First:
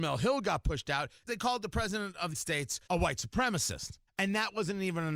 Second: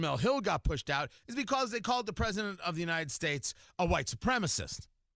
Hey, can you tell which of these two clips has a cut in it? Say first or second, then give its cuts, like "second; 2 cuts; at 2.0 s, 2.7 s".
first; 4 cuts; at 1.3 s, 2.3 s, 2.8 s, 4.1 s